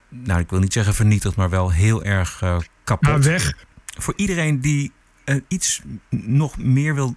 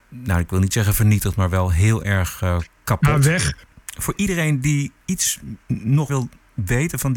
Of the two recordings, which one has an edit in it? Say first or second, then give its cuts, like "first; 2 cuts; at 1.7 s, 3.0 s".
second; 2 cuts; at 5.0 s, 6.1 s